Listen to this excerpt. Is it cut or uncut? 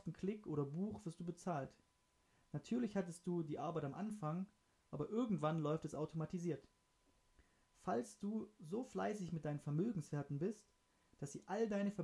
uncut